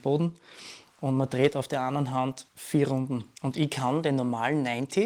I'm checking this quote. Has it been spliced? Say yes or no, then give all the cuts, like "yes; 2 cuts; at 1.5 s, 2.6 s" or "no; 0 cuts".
yes; 2 cuts; at 2.5 s, 3.4 s